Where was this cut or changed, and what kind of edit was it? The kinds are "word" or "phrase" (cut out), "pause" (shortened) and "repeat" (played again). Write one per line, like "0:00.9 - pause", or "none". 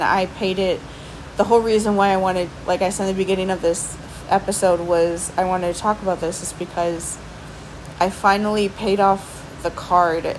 none